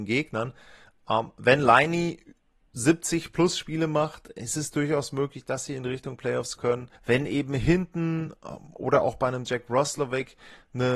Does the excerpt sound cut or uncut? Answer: cut